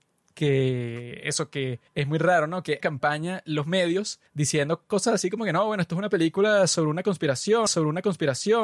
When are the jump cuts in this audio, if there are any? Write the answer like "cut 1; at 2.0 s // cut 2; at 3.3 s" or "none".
cut 1; at 1.9 s // cut 2; at 2.8 s // cut 3; at 4.3 s // cut 4; at 7.7 s